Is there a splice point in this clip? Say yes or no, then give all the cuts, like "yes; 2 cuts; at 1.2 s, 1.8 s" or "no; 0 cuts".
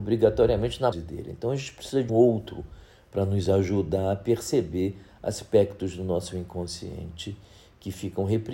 yes; 2 cuts; at 0.9 s, 2.1 s